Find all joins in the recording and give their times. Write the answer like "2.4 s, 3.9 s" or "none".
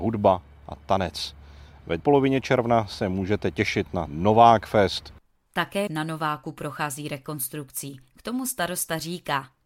2.0 s, 4.1 s, 5.9 s

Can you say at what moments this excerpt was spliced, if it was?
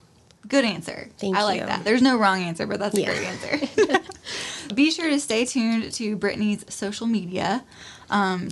4.7 s

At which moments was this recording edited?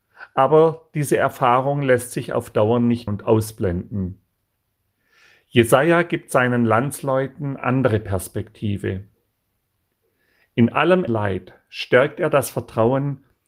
3.1 s, 7.6 s, 11.1 s

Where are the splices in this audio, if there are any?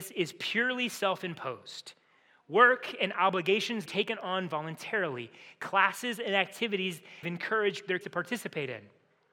3.9 s, 7.2 s, 8.0 s

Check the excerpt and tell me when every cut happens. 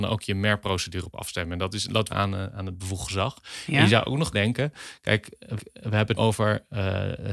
2.1 s, 4.3 s, 5.6 s, 6.2 s

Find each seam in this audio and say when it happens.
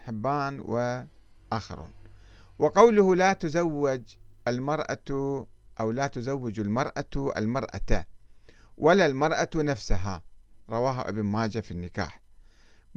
none

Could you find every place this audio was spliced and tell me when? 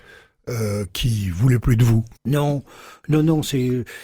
2.2 s

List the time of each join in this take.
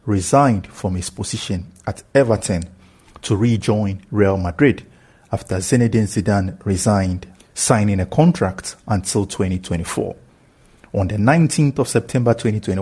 7.3 s

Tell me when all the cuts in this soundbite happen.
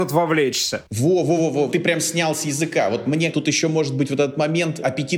1.4 s, 1.7 s, 3.3 s

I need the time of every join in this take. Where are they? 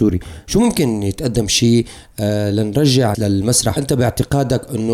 3.1 s, 3.8 s

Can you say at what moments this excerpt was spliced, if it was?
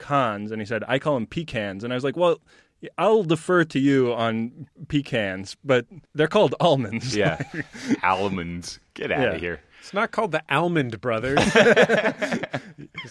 6.0 s

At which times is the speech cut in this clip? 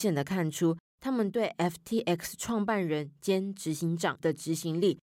4.2 s

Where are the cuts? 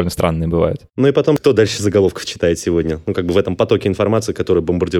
none

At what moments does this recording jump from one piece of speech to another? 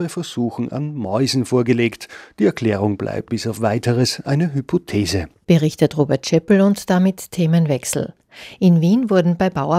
3.3 s

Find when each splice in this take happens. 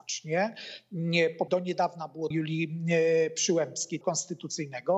1.5 s, 2.3 s, 4.0 s

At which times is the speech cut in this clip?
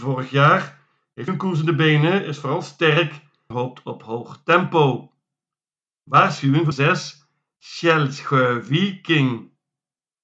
1.3 s, 3.5 s, 6.7 s

